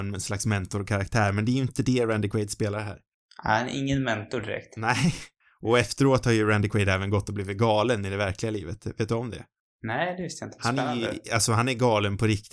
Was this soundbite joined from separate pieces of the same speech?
no; 0 cuts

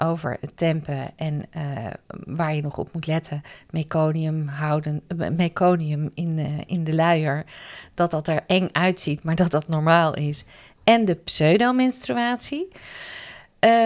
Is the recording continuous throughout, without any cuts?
yes; 0 cuts

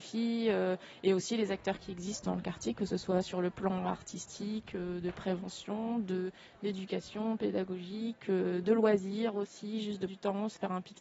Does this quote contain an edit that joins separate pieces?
yes; 2 cuts; at 2.2 s, 10.1 s

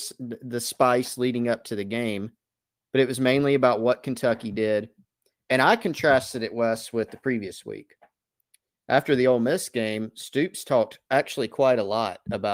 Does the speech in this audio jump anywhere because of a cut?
no; 0 cuts

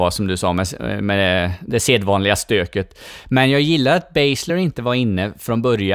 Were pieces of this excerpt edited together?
no; 0 cuts

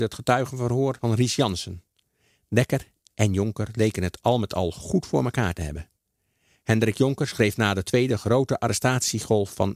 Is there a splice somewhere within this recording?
no; 0 cuts

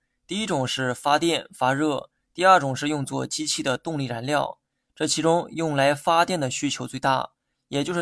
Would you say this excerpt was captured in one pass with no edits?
yes; 0 cuts

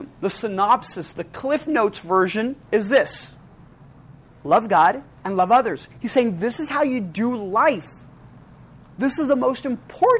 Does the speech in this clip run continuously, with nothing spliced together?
no; 3 cuts; at 2.6 s, 4.2 s, 5.1 s

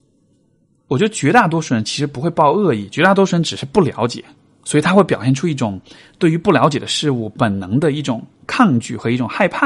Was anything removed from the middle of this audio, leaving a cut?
no; 0 cuts

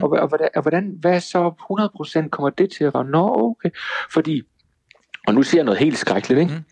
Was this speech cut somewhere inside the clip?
yes; 1 cut; at 2.9 s

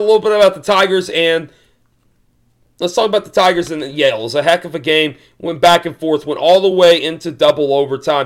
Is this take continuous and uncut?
yes; 0 cuts

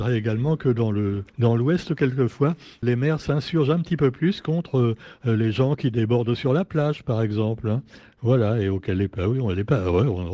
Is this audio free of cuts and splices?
no; 2 cuts; at 1.3 s, 2.8 s

